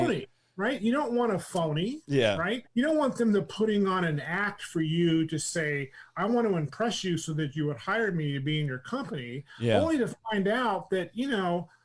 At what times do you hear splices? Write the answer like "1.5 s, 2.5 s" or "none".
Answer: 2.7 s